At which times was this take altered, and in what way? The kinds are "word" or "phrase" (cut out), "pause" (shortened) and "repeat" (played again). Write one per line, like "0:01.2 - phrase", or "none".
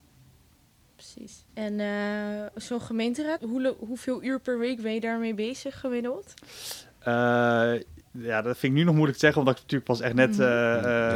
0:01.5 - pause
0:03.4 - word
0:08.0 - pause